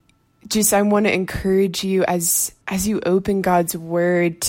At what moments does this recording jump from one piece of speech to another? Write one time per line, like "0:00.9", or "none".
0:02.6

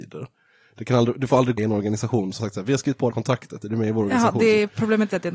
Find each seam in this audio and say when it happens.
0:01.6
0:02.4
0:03.1

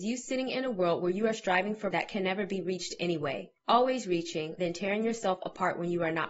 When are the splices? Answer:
0:01.9
0:03.6
0:04.6

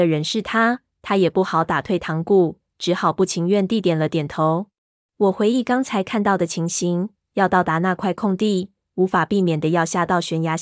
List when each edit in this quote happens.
0:04.9

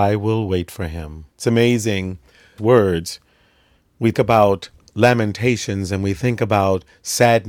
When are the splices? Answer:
0:01.3
0:02.6
0:04.1
0:04.8

